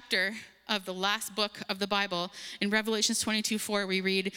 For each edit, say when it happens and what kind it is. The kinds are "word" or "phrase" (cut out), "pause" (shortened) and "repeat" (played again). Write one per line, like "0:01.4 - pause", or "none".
none